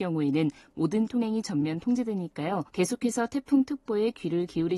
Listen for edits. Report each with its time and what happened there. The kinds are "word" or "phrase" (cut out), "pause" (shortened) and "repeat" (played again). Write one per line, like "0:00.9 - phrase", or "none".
0:01.1 - word
0:02.7 - pause